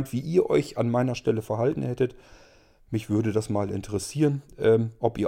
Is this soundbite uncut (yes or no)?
yes